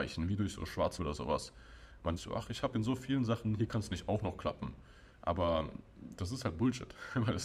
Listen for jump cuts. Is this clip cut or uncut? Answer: cut